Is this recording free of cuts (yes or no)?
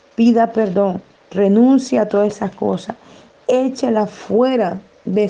yes